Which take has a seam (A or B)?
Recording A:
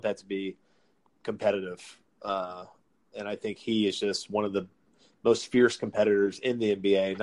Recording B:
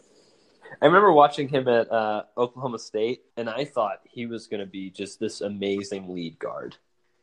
B